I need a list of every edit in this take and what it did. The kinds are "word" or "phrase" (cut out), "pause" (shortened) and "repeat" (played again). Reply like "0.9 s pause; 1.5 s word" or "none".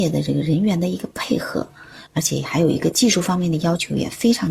2.1 s pause